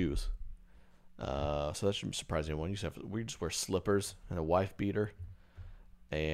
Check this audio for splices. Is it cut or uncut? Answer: uncut